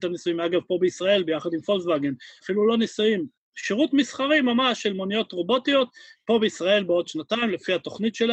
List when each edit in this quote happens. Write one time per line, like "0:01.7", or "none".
none